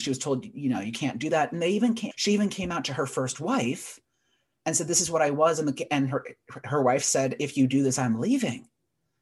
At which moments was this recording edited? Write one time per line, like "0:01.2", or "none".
0:02.1